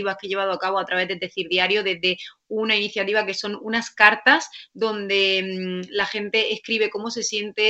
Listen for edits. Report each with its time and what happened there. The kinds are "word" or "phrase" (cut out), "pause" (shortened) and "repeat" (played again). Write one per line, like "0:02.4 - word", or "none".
none

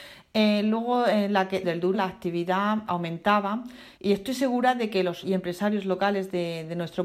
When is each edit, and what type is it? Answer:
0:01.6 - word
0:01.9 - word
0:02.9 - word
0:03.9 - pause
0:05.2 - word

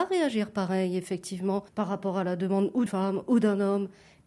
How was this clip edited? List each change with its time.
0:01.7 - pause
0:02.9 - word

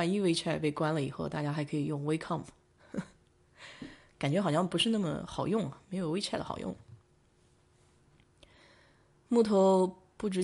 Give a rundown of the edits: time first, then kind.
none

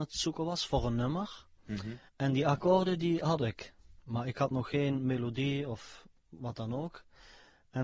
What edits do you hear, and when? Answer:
0:02.1 - pause

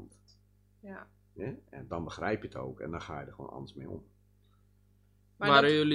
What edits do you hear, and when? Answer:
none

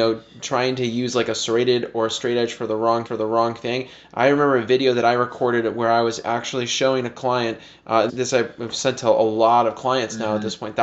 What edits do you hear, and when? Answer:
0:03.1 - repeat
0:08.1 - word

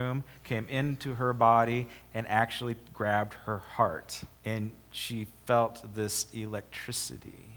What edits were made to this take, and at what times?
0:04.3 - pause

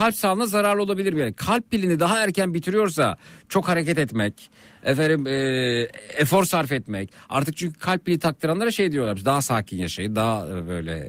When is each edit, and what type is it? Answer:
none

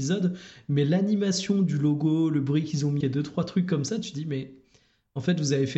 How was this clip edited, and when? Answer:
0:03.0 - word

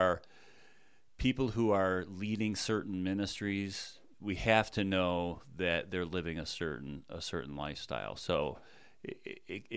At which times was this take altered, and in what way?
0:04.1 - word

